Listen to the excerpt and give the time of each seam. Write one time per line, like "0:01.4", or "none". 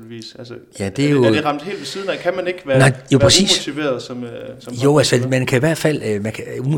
none